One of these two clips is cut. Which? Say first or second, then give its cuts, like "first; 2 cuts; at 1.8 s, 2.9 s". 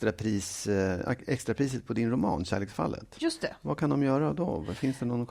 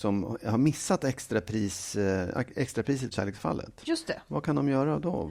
second; 1 cut; at 3.1 s